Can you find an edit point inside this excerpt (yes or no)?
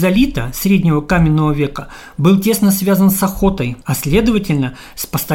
yes